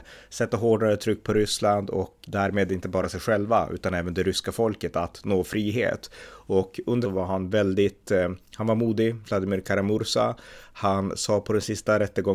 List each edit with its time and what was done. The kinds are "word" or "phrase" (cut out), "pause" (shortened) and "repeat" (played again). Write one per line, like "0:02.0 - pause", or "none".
0:02.2 - word
0:03.0 - word
0:07.0 - phrase